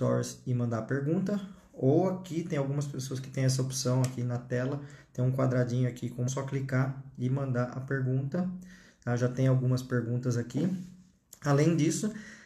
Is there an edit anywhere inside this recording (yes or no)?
yes